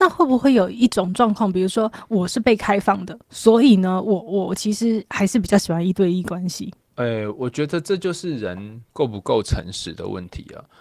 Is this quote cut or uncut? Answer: cut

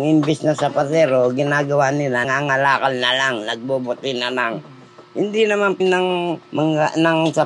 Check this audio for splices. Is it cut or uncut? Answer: cut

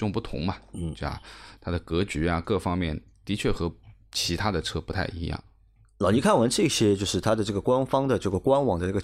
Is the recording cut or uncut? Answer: uncut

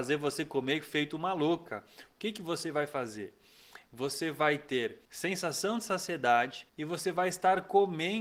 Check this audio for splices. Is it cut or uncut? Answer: cut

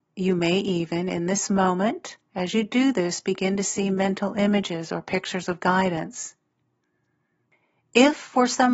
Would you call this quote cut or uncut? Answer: uncut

